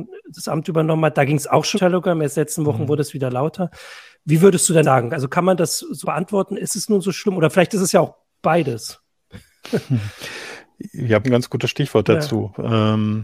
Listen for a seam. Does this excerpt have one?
yes; 4 cuts; at 1.7 s, 4.8 s, 6.0 s, 11.2 s

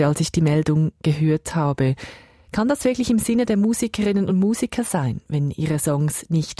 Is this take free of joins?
yes; 0 cuts

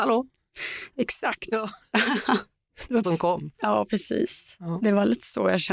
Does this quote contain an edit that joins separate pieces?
yes; 2 cuts; at 3.0 s, 3.5 s

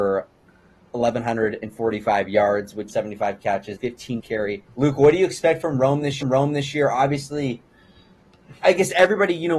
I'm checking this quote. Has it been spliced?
yes; 5 cuts; at 2.9 s, 3.8 s, 4.2 s, 4.7 s, 6.2 s

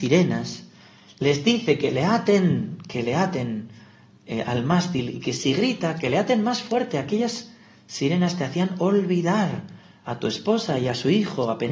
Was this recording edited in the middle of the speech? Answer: no; 0 cuts

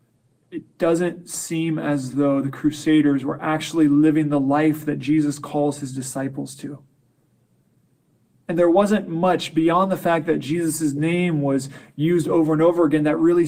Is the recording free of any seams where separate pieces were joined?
yes; 0 cuts

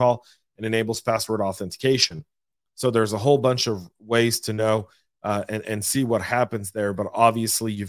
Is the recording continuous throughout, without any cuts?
yes; 0 cuts

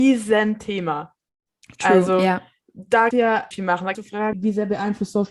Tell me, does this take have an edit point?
yes; 4 cuts; at 3.1 s, 3.5 s, 3.9 s, 4.3 s

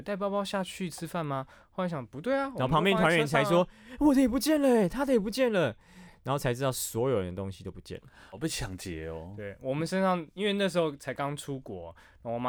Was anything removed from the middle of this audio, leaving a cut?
no; 0 cuts

